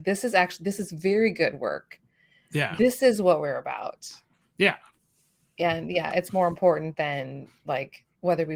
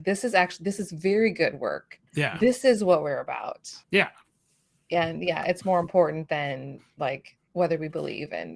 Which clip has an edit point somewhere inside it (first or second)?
second